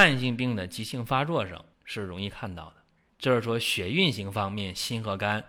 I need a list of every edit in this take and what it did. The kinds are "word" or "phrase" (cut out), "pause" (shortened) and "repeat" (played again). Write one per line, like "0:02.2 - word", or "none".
0:01.7 - pause
0:03.1 - pause

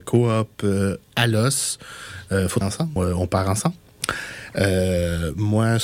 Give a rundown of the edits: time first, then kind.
0:02.6 - word
0:03.0 - word

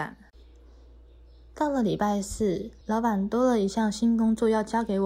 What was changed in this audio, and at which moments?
0:02.8 - pause

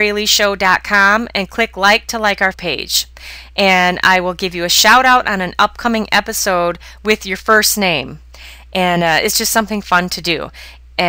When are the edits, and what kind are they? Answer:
0:02.5 - word

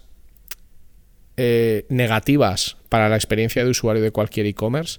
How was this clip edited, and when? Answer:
none

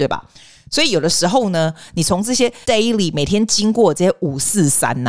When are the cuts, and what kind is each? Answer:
0:02.6 - pause

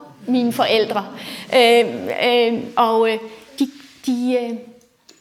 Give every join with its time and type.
none

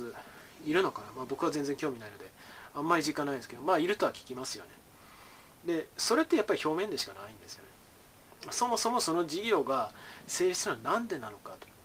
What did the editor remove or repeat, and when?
0:05.5 - pause

